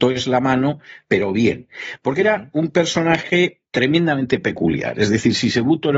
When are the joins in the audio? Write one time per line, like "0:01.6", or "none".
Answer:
0:03.7